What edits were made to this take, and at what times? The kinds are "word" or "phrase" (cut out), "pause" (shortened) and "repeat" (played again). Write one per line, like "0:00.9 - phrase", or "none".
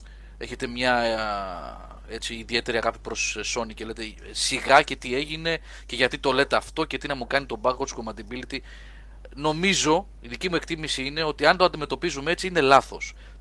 none